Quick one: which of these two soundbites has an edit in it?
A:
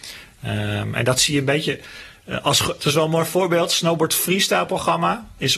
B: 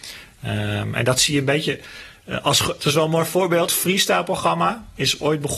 B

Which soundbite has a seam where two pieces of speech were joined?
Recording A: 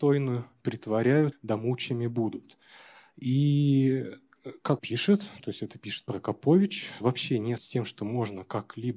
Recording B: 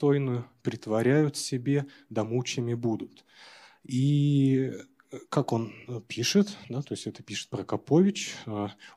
A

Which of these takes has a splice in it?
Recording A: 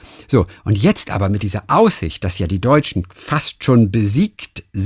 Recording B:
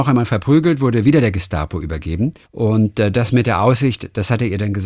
B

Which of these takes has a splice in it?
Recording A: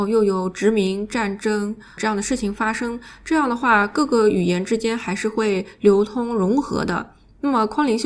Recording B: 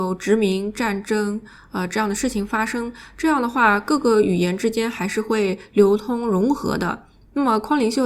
A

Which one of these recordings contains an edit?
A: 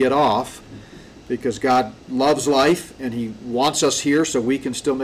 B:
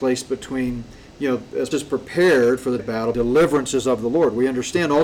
B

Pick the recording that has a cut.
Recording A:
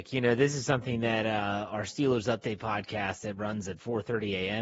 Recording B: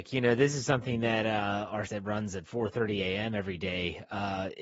B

